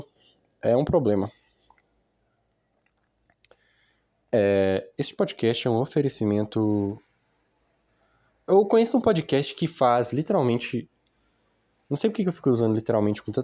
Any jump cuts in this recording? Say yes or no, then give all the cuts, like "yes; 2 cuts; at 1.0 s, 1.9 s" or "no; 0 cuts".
no; 0 cuts